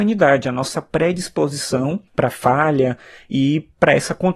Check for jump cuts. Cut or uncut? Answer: cut